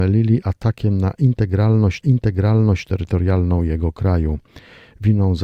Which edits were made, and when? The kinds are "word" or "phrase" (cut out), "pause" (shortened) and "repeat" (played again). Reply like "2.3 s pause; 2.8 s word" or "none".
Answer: 2.0 s repeat